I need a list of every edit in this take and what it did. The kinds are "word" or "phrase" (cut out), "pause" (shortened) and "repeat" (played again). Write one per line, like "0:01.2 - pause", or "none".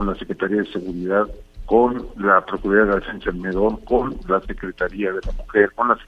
none

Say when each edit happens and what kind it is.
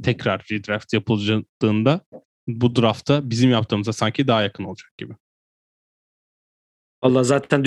none

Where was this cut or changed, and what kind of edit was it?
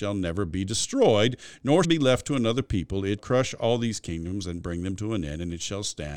0:01.8 - phrase
0:03.2 - word

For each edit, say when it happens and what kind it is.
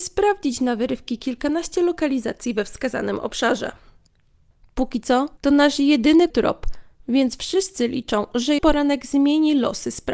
0:05.4 - pause
0:06.3 - word
0:08.6 - word

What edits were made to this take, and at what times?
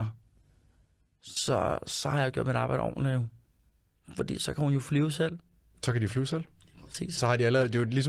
0:07.2 - word

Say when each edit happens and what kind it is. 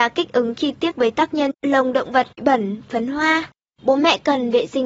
0:00.9 - word
0:01.5 - word
0:02.4 - word

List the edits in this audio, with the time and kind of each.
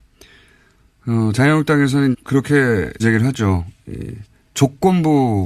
0:02.1 - word
0:03.0 - word

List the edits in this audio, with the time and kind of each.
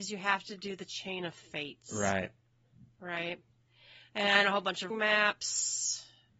0:04.9 - word

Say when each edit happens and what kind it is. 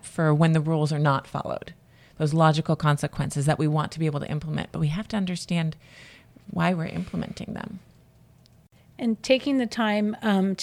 none

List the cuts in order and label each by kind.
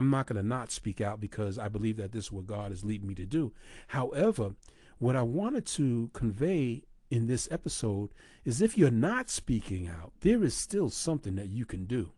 none

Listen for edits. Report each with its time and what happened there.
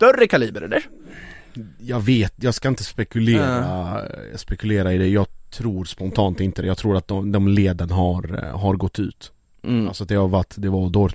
none

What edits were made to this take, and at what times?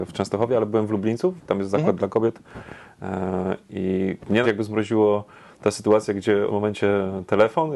0:04.4 - word
0:06.5 - word

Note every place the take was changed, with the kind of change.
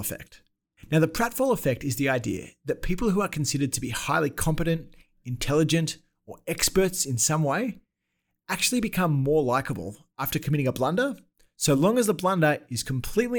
none

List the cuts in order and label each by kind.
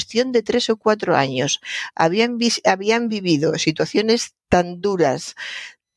none

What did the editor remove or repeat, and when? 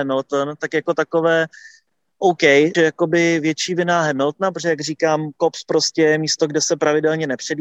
0:02.7 - word

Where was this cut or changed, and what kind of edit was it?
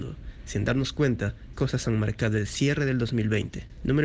0:01.5 - word

